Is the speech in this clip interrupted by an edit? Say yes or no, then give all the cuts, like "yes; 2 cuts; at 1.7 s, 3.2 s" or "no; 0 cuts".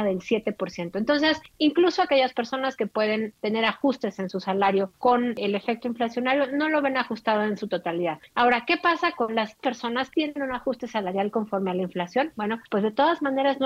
yes; 2 cuts; at 9.6 s, 10.1 s